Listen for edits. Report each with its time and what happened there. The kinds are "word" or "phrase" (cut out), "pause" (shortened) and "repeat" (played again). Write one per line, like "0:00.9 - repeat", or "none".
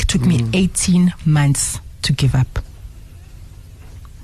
none